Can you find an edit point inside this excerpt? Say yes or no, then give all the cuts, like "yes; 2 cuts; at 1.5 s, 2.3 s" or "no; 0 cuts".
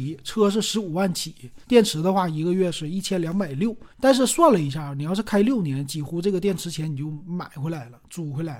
yes; 2 cuts; at 1.6 s, 3.9 s